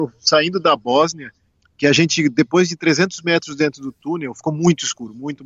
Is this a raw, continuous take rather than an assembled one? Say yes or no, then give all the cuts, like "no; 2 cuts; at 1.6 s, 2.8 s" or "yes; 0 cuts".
no; 1 cut; at 1.5 s